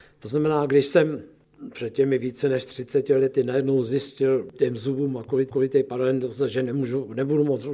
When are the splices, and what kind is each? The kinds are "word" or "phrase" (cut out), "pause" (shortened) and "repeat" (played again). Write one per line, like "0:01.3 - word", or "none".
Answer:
0:04.5 - word
0:05.5 - repeat